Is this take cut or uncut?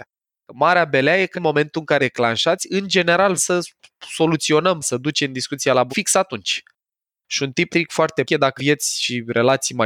cut